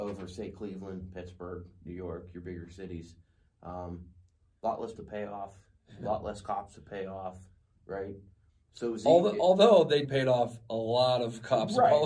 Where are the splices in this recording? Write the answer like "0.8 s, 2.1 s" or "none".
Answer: 5.0 s, 10.0 s